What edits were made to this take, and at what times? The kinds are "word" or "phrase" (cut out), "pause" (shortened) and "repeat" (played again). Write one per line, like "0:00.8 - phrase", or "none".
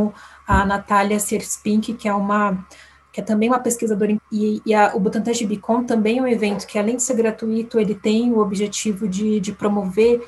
0:04.2 - word